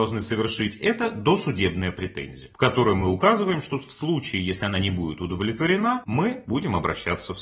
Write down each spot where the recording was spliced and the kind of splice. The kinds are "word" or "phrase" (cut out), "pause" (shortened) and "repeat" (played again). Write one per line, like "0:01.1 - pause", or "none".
none